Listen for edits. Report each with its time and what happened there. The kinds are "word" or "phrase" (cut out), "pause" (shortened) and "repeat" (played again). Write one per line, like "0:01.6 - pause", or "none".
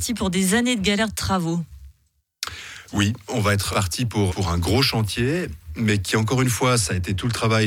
0:03.7 - word
0:04.3 - word